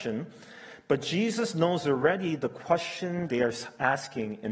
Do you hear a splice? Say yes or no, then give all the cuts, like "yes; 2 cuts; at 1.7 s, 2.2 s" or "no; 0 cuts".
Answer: yes; 1 cut; at 3.3 s